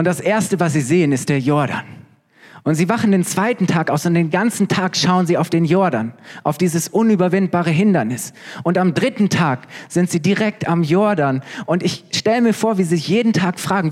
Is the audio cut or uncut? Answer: uncut